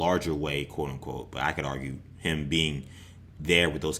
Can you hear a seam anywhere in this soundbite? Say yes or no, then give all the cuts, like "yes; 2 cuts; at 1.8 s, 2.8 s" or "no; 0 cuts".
no; 0 cuts